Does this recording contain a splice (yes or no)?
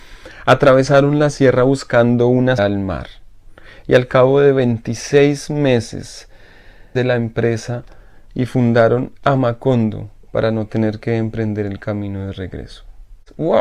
yes